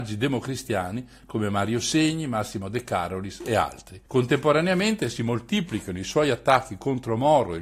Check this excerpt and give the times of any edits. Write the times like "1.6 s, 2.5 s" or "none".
4.1 s